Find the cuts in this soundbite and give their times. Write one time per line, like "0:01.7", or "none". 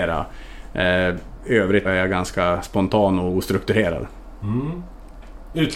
0:01.8